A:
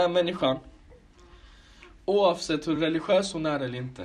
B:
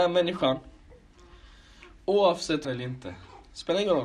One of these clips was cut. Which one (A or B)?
B